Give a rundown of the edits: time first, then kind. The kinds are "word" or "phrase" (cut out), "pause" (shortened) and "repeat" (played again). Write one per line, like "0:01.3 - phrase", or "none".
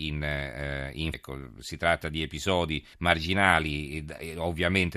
0:01.1 - word
0:02.9 - pause